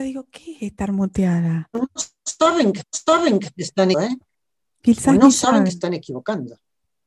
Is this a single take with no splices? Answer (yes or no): no